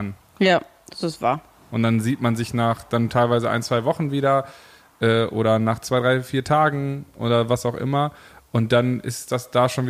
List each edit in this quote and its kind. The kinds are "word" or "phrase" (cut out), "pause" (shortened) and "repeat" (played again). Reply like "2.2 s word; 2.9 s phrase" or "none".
none